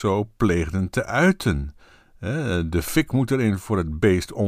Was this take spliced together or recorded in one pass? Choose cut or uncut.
uncut